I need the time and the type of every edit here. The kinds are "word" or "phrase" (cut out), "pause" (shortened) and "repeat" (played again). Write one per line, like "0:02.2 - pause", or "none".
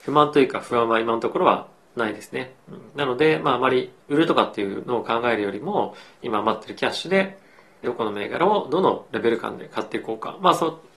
0:02.6 - pause
0:04.0 - pause
0:07.8 - phrase